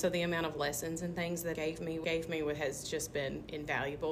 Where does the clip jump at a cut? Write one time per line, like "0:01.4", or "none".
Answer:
0:01.5
0:02.0

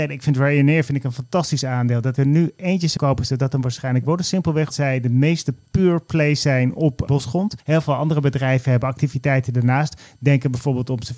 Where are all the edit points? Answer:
0:02.2
0:03.0
0:04.7
0:07.1
0:07.6

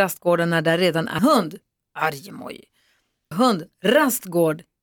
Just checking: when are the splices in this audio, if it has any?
0:01.2
0:03.3

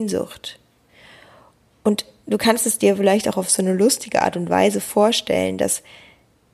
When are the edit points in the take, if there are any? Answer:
none

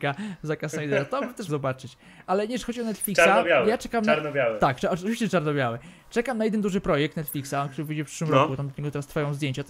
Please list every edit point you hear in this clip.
0:01.5

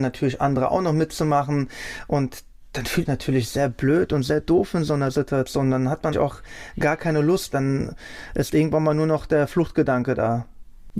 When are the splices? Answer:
0:03.0
0:06.1
0:07.5

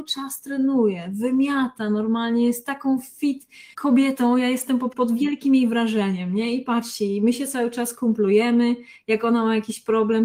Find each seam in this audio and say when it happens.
0:03.7
0:04.9

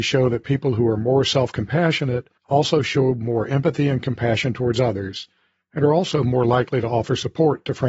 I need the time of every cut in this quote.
0:02.4

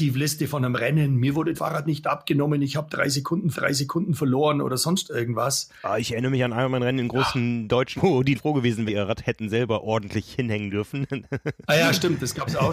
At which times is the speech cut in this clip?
0:01.5
0:03.5
0:08.0
0:08.3
0:08.9

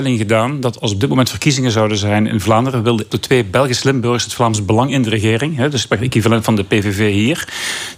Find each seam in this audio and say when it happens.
0:03.1

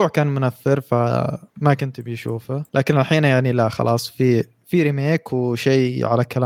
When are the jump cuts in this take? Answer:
0:02.7

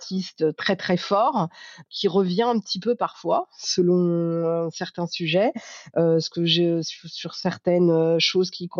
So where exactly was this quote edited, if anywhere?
none

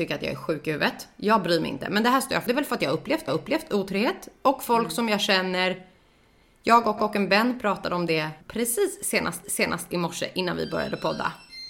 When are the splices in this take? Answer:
0:02.5
0:03.3
0:07.0
0:08.4
0:09.4

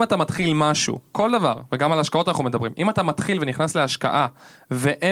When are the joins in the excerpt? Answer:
0:01.1

